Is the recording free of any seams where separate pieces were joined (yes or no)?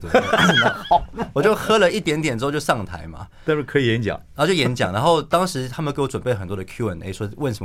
no